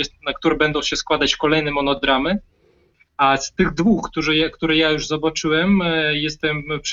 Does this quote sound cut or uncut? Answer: uncut